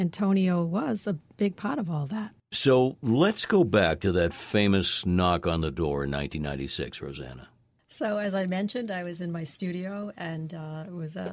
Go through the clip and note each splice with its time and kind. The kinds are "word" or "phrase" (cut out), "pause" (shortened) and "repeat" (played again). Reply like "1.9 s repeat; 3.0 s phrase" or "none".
none